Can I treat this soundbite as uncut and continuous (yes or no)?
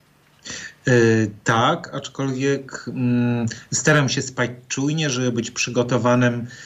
yes